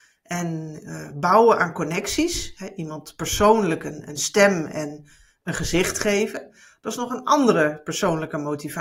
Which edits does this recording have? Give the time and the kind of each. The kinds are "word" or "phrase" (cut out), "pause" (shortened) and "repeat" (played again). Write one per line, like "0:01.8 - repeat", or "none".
none